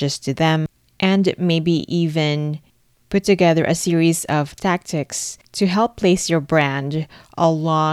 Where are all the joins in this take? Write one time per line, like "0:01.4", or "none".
none

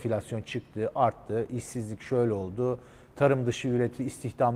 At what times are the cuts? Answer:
none

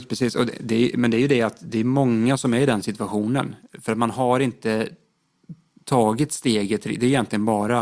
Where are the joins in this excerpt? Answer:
none

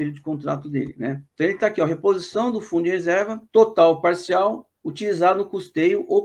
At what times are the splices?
0:01.3
0:03.4
0:04.8

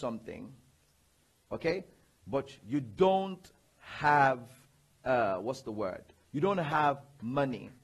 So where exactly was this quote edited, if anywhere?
none

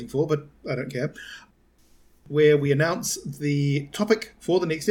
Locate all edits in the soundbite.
none

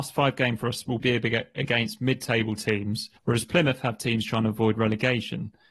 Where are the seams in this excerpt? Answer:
0:01.0
0:03.2

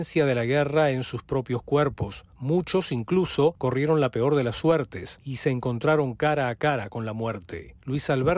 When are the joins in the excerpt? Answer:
none

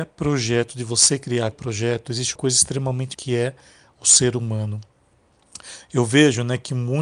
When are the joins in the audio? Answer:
0:01.5
0:02.4
0:03.1

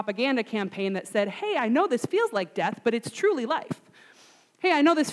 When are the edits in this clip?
none

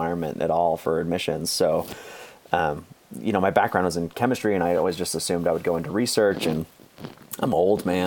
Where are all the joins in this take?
none

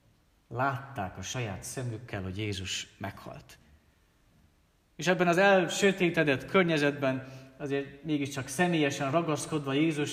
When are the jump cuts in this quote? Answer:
none

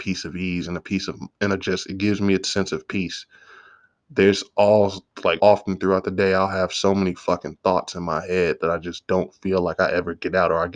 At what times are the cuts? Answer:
0:05.4

